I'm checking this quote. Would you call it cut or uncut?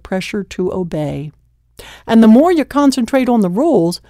uncut